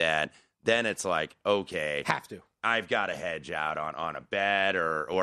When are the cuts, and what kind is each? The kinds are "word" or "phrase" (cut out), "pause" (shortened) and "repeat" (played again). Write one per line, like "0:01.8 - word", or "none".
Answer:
none